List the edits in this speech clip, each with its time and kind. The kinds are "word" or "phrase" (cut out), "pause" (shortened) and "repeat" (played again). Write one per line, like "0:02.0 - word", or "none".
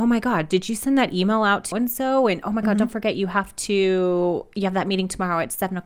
0:01.7 - word